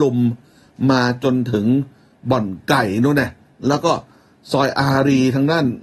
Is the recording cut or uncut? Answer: uncut